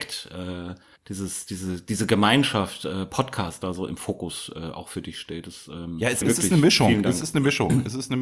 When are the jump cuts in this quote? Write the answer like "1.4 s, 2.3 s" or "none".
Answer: 1.0 s, 6.2 s

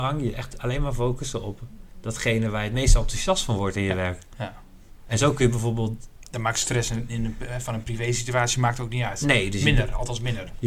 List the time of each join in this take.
none

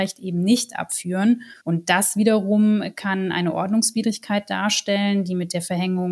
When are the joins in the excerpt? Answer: 1.6 s

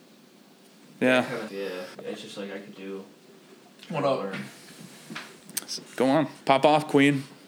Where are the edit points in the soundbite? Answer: 1.5 s, 1.9 s, 2.7 s, 6.4 s

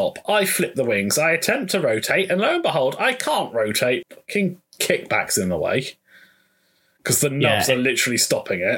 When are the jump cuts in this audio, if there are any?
4.0 s

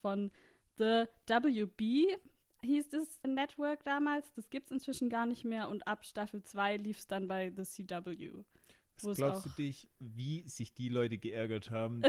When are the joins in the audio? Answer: 3.2 s

